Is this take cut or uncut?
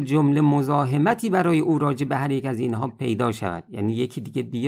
uncut